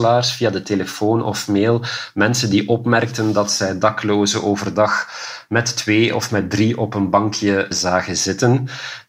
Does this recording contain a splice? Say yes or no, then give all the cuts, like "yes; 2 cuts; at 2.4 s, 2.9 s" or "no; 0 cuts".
yes; 1 cut; at 7.7 s